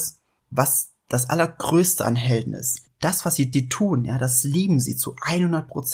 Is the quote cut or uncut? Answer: cut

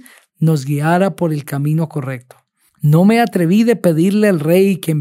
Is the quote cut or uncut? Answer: uncut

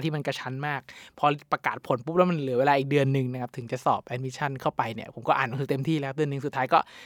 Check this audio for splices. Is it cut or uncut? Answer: uncut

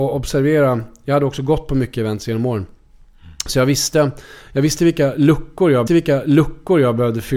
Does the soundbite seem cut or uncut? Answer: cut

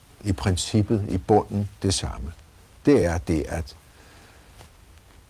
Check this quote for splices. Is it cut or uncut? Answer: uncut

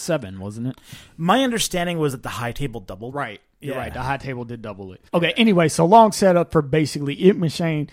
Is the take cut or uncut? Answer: cut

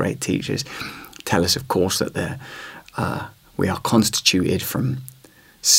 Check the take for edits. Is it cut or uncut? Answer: uncut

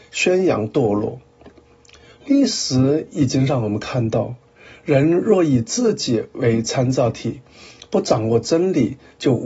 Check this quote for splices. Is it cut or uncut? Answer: uncut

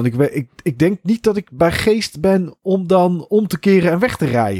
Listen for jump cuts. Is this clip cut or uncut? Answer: uncut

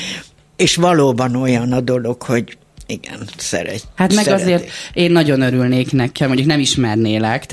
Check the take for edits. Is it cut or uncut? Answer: cut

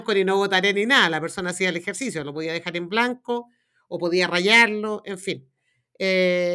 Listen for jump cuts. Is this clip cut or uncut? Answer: uncut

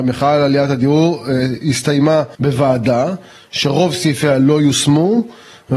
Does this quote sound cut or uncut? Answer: cut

